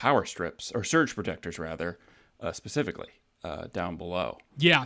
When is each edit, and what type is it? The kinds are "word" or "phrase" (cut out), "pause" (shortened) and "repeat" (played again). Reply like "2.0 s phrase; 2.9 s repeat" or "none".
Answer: none